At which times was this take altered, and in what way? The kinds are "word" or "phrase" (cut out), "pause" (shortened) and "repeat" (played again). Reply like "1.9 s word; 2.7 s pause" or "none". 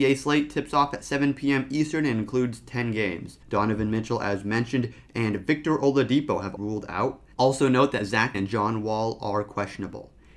3.4 s pause; 6.6 s phrase; 7.3 s pause; 8.3 s word